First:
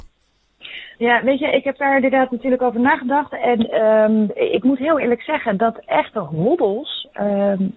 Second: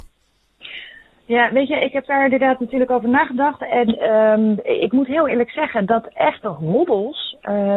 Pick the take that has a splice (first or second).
first